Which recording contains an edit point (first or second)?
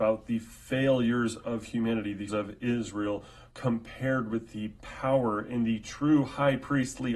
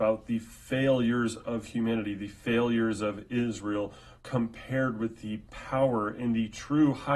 first